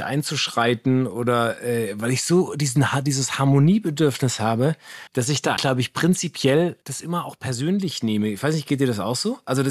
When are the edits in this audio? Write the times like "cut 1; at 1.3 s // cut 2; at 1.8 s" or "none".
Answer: cut 1; at 5.1 s // cut 2; at 5.6 s // cut 3; at 6.8 s